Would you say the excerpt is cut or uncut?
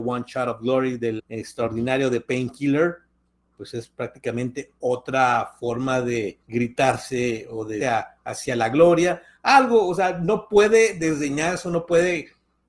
cut